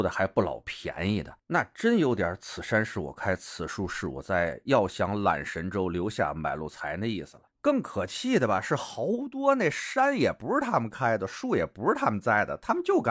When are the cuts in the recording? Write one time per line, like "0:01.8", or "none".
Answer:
0:01.4
0:07.5